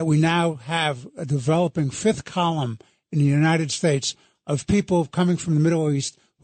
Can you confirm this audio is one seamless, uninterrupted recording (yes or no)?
yes